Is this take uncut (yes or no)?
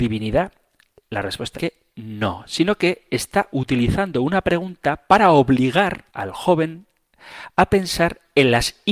no